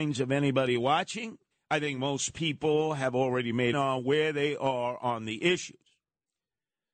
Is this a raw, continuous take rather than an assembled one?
no; 2 cuts; at 1.5 s, 3.7 s

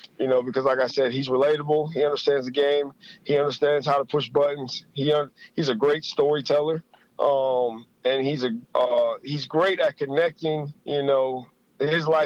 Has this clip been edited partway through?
yes; 3 cuts; at 7.0 s, 8.6 s, 10.8 s

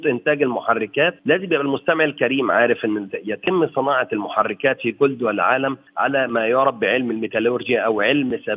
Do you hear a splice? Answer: yes; 2 cuts; at 1.2 s, 5.9 s

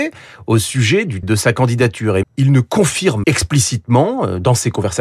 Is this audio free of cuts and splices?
no; 3 cuts; at 1.2 s, 2.2 s, 3.2 s

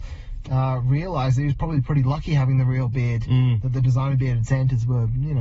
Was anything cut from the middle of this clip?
no; 0 cuts

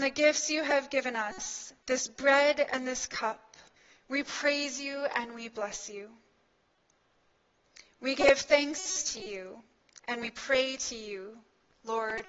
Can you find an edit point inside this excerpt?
yes; 1 cut; at 3.8 s

